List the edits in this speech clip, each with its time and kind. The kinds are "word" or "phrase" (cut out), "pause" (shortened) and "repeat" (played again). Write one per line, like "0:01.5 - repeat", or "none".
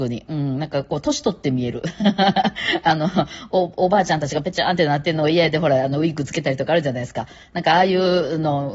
none